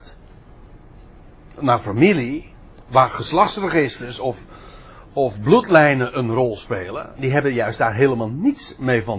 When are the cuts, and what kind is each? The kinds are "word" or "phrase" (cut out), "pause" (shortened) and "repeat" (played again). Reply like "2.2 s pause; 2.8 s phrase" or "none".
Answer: none